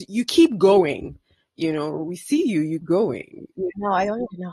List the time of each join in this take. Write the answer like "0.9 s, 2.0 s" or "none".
2.8 s

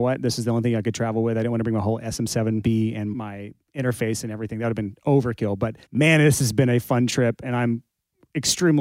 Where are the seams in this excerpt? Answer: 5.8 s

